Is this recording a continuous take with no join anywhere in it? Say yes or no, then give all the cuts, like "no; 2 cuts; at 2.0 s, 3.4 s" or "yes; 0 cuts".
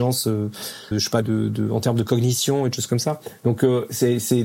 no; 2 cuts; at 0.9 s, 1.2 s